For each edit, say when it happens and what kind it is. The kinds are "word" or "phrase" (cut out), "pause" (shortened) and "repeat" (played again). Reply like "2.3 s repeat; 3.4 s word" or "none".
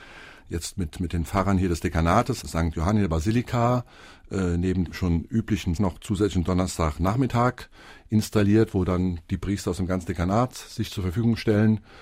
2.4 s phrase; 4.9 s word; 5.8 s word